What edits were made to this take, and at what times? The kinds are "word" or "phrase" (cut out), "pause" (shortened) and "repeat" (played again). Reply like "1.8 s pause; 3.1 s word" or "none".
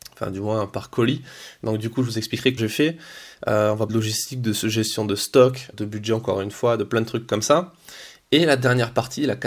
2.6 s word; 3.9 s word; 5.7 s word